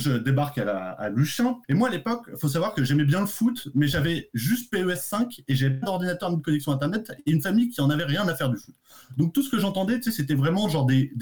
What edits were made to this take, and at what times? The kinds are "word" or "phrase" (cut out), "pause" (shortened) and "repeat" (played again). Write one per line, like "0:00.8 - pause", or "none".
0:01.6 - pause